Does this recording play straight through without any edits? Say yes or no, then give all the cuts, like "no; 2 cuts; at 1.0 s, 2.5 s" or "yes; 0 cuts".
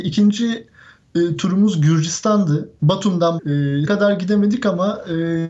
no; 2 cuts; at 3.4 s, 3.9 s